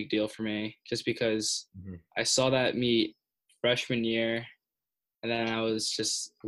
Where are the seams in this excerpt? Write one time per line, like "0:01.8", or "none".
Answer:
none